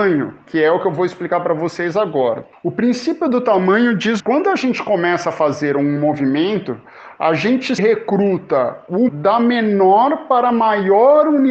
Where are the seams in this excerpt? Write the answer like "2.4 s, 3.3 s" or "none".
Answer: 2.5 s, 4.2 s, 7.8 s, 9.1 s